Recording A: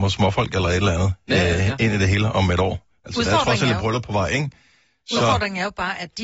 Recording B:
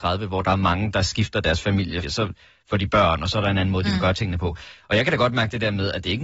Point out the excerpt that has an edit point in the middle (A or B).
B